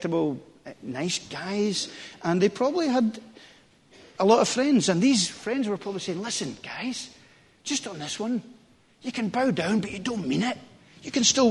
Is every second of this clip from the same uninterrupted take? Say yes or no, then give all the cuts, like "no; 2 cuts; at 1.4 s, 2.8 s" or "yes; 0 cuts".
yes; 0 cuts